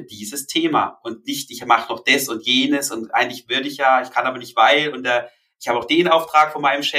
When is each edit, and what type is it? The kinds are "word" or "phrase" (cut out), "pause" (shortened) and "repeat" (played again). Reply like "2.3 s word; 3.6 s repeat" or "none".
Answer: none